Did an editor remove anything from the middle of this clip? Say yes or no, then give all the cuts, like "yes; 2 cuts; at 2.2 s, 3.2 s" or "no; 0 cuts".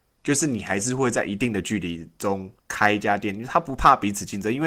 yes; 1 cut; at 2.6 s